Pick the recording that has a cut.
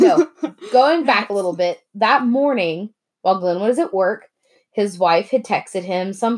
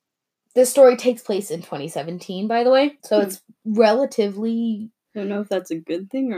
second; 2 cuts; at 3.0 s, 5.1 s

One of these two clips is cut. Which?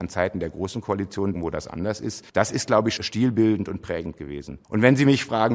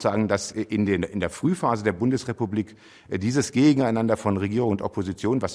first; 4 cuts; at 1.3 s, 2.3 s, 3.0 s, 4.6 s

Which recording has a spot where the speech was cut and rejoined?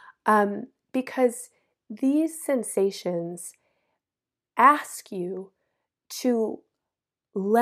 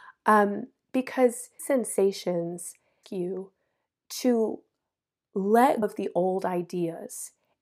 second; 3 cuts; at 1.6 s, 3.0 s, 5.8 s

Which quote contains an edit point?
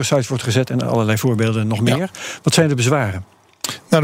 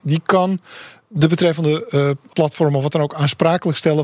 second; 1 cut; at 2.3 s

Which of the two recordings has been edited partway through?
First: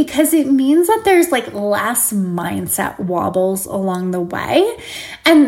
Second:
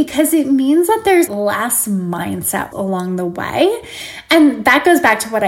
second; 2 cuts; at 1.3 s, 2.7 s

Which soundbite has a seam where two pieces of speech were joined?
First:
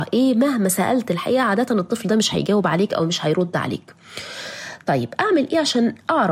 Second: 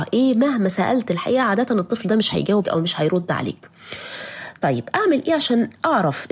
second; 1 cut; at 2.6 s

